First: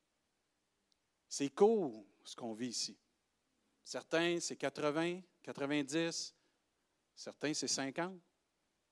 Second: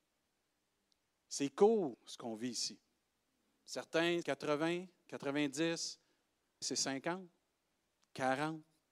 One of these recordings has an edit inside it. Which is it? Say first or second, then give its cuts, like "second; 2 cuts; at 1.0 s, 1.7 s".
second; 3 cuts; at 1.9 s, 4.2 s, 6.6 s